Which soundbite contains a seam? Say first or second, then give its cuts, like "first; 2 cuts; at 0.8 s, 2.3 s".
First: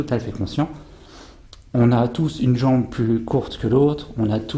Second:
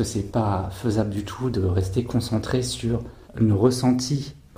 second; 1 cut; at 3.2 s